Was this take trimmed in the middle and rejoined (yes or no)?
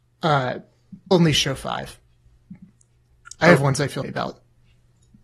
yes